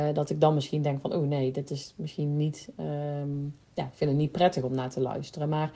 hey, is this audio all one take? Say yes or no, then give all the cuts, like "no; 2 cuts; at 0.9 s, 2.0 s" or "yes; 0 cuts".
yes; 0 cuts